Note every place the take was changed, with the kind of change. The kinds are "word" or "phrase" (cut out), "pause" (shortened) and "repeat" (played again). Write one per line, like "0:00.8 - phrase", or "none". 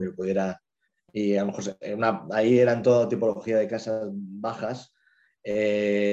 none